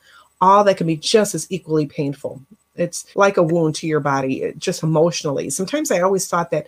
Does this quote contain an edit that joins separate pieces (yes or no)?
yes